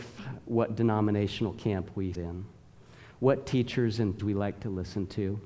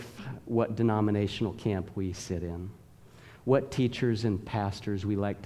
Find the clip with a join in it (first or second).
first